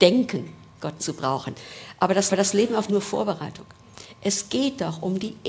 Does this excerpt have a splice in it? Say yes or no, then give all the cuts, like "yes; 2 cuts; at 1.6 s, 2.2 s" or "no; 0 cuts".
yes; 3 cuts; at 1.0 s, 2.3 s, 2.9 s